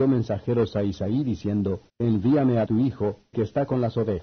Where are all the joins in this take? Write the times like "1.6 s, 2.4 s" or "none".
1.9 s, 2.7 s, 3.3 s